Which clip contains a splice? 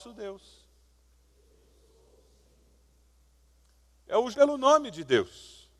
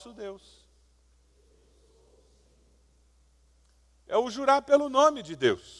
first; 1 cut; at 4.3 s

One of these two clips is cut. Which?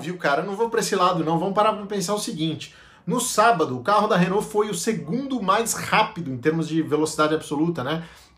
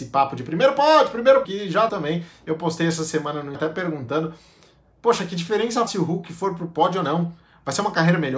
second; 4 cuts; at 1.4 s, 1.9 s, 3.5 s, 5.9 s

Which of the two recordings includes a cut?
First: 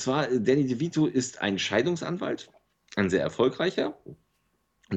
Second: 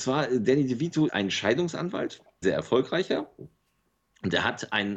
second; 2 cuts; at 1.1 s, 2.4 s

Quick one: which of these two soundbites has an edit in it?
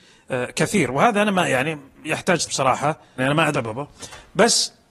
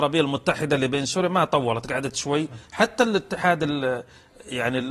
first; 3 cuts; at 2.5 s, 3.2 s, 3.5 s

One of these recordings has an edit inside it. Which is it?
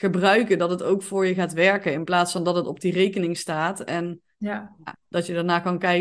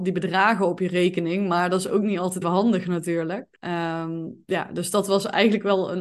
second; 2 cuts; at 2.4 s, 3.6 s

